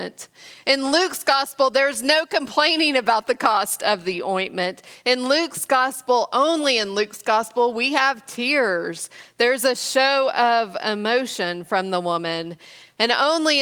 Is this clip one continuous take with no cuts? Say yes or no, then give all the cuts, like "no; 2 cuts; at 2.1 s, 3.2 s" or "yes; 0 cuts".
yes; 0 cuts